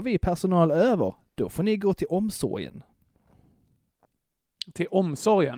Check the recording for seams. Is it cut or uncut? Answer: uncut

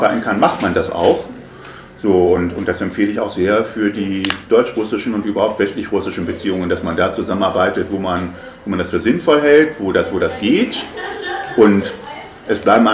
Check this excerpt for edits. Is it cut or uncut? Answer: uncut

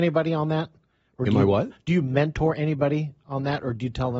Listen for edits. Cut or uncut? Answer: uncut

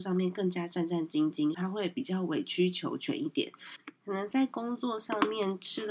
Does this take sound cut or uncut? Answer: cut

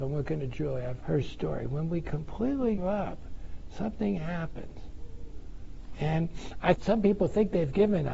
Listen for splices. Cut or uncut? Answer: cut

